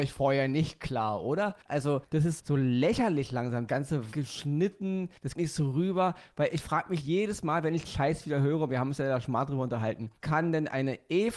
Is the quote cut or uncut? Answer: cut